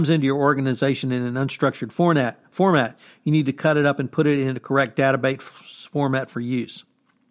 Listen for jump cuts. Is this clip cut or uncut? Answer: uncut